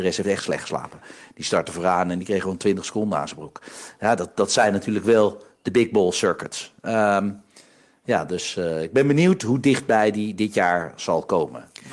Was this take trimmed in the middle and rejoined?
no; 0 cuts

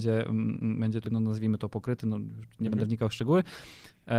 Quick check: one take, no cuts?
no; 1 cut; at 1.0 s

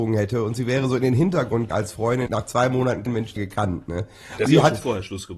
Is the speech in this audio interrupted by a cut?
yes; 5 cuts; at 1.7 s, 2.3 s, 3.1 s, 3.4 s, 4.5 s

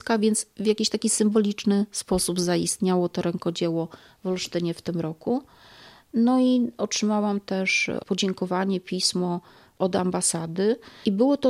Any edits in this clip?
yes; 1 cut; at 8.0 s

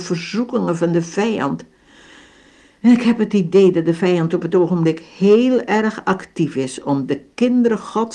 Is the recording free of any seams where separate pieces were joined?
yes; 0 cuts

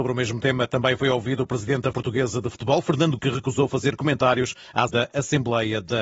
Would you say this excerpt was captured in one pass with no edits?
no; 3 cuts; at 1.9 s, 3.2 s, 4.9 s

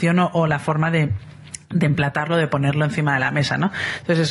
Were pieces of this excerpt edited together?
no; 0 cuts

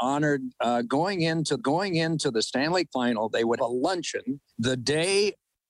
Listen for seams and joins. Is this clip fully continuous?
no; 4 cuts; at 1.6 s, 2.9 s, 3.6 s, 4.5 s

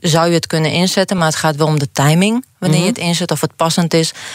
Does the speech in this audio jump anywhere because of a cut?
no; 0 cuts

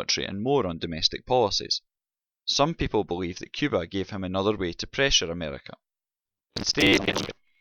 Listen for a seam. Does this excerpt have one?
no; 0 cuts

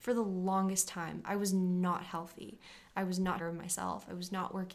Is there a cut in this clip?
yes; 1 cut; at 3.4 s

